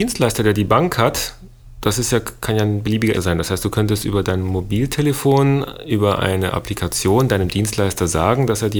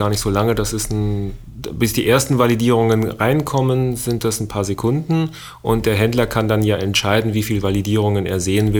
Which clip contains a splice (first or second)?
first